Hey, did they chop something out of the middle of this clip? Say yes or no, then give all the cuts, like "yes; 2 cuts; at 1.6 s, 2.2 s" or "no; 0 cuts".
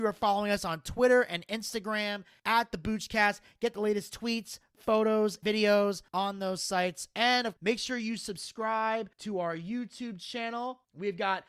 yes; 4 cuts; at 5.4 s, 6.1 s, 7.6 s, 9.1 s